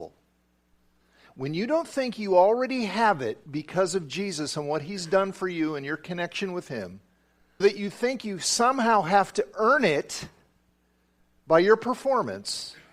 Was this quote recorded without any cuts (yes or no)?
no